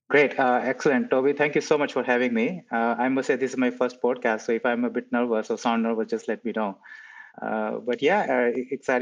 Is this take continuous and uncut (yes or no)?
no